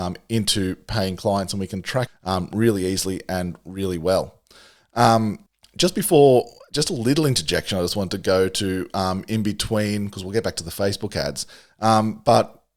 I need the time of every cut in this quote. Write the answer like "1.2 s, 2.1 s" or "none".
2.1 s, 5.5 s